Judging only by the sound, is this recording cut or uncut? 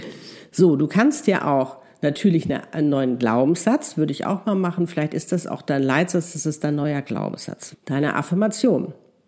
cut